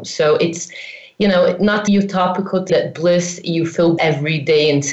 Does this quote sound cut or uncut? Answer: cut